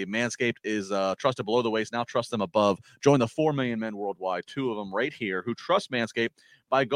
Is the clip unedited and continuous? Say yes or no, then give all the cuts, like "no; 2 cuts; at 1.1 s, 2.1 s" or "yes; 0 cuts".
yes; 0 cuts